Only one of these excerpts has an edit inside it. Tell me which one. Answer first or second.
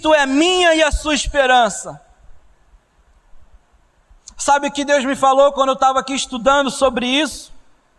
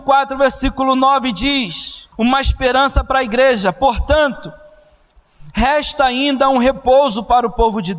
second